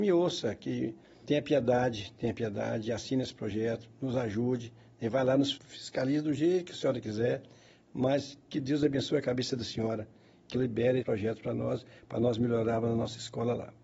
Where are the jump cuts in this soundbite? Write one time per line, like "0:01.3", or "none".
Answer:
0:01.2
0:05.5
0:10.5
0:11.0